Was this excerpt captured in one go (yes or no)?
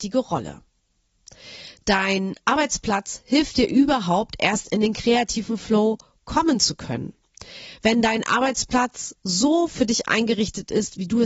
yes